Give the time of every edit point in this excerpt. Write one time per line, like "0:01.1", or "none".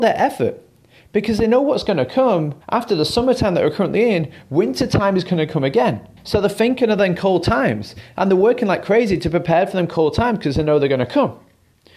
0:02.6
0:06.2